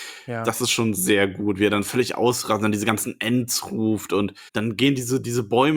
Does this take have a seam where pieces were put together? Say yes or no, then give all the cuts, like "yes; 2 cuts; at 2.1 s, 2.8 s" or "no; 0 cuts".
yes; 1 cut; at 4.5 s